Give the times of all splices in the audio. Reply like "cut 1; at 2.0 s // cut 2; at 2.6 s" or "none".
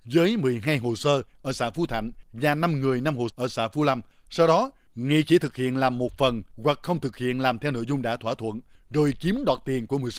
cut 1; at 3.3 s